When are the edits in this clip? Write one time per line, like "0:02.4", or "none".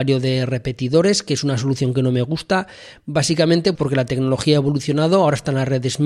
0:03.8